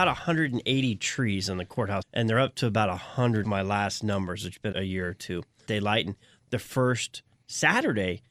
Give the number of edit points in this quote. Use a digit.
4